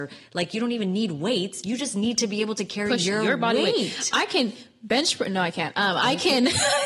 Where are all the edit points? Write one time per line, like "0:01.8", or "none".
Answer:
none